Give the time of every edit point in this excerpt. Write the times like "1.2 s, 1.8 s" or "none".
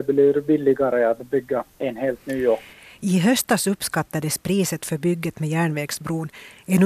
none